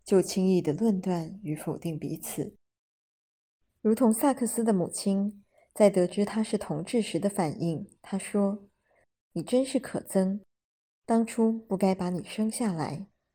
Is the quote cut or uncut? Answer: uncut